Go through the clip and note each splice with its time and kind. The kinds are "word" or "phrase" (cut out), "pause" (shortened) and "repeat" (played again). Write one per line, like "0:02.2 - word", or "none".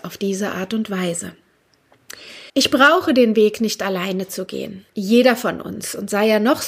0:02.5 - pause
0:04.9 - pause